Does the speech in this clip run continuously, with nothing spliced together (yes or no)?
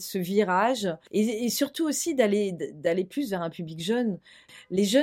yes